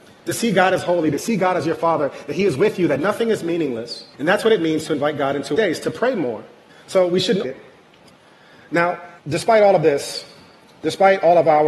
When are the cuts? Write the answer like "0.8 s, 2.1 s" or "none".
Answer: 4.1 s, 5.5 s, 6.7 s, 7.4 s, 9.2 s